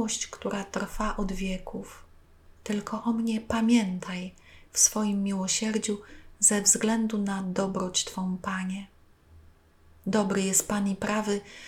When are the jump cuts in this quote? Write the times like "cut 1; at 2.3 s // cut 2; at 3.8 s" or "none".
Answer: cut 1; at 2.6 s